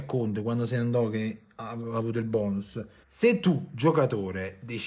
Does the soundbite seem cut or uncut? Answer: cut